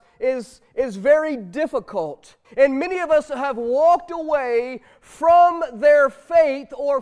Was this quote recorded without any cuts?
no; 1 cut; at 2.4 s

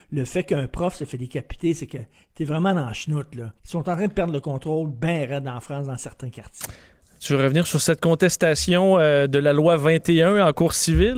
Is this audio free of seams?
no; 1 cut; at 3.6 s

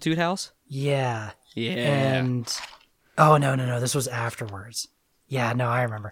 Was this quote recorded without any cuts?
yes; 0 cuts

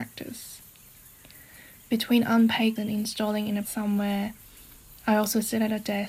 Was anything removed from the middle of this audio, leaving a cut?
yes; 2 cuts; at 2.8 s, 3.6 s

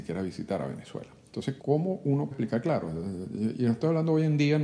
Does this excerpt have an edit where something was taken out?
yes; 2 cuts; at 1.6 s, 2.3 s

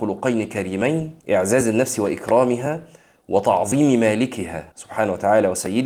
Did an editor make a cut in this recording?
yes; 2 cuts; at 1.2 s, 4.7 s

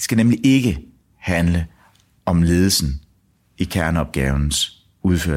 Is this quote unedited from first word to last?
yes; 0 cuts

